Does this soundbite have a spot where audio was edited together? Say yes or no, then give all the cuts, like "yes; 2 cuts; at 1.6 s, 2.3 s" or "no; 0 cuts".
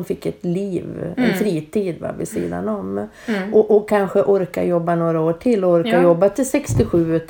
no; 0 cuts